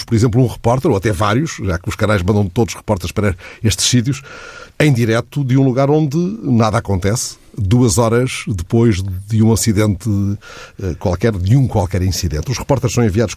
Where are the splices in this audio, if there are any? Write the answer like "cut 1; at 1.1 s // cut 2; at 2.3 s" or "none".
cut 1; at 7.5 s